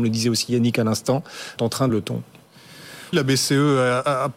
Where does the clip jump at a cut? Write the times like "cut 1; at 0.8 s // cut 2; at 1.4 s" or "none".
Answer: cut 1; at 1.6 s // cut 2; at 1.9 s // cut 3; at 3.1 s